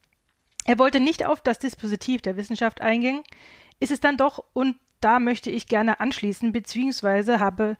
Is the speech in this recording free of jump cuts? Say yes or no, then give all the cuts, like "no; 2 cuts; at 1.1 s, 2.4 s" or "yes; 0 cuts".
yes; 0 cuts